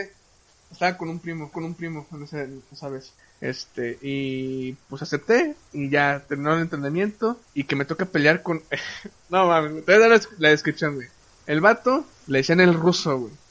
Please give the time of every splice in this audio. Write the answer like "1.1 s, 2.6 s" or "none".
1.5 s, 3.2 s, 7.4 s, 11.2 s, 12.1 s